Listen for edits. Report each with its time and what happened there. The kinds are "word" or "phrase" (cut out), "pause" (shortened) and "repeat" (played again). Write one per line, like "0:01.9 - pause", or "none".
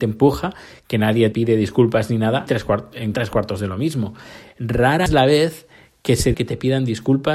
0:01.3 - word
0:02.5 - word
0:03.1 - word
0:05.1 - word
0:06.3 - word